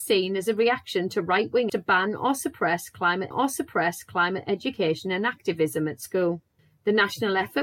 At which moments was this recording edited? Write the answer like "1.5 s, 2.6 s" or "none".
1.7 s, 3.3 s, 6.6 s